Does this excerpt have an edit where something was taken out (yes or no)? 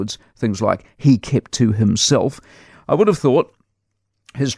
no